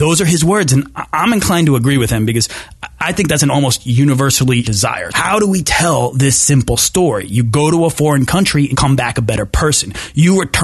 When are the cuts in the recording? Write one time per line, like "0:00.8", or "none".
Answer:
0:03.0
0:04.6
0:05.1
0:08.7